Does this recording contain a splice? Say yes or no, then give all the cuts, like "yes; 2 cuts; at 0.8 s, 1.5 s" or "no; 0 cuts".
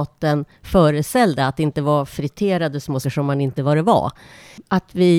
yes; 2 cuts; at 3.0 s, 3.6 s